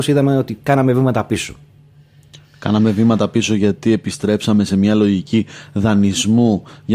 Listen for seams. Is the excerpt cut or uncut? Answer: uncut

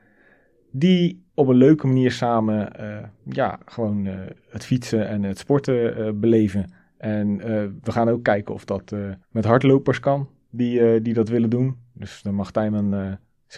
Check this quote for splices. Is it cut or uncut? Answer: cut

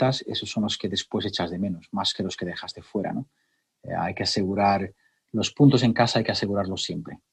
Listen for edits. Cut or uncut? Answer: uncut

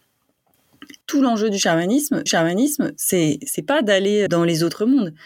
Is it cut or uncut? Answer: cut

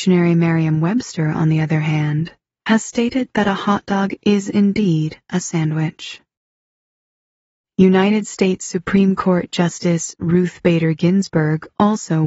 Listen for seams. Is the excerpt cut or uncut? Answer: uncut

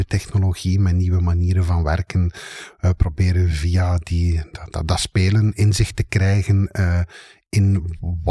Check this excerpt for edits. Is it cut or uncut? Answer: uncut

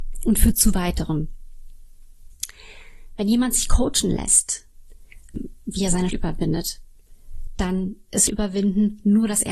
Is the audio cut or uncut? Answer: cut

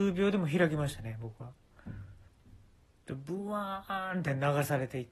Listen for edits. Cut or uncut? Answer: uncut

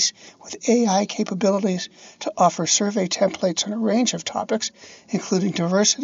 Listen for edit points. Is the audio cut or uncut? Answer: uncut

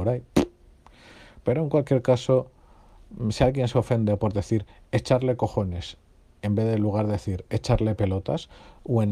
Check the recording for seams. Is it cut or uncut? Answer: uncut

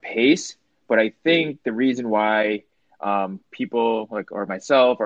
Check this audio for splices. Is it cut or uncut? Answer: uncut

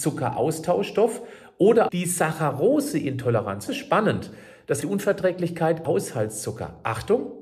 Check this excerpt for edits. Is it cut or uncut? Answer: cut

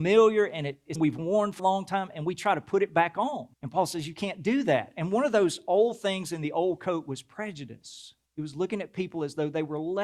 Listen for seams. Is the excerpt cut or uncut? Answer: cut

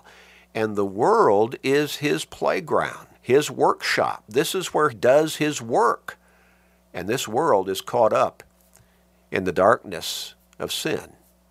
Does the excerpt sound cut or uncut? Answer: cut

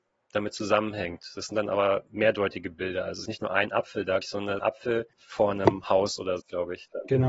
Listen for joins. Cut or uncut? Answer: cut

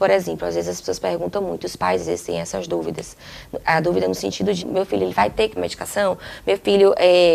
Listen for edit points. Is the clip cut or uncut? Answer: cut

